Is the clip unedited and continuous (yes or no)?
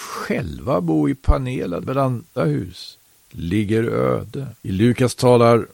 no